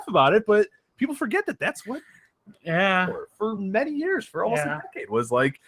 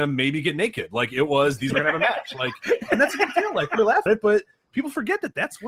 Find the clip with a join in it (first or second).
second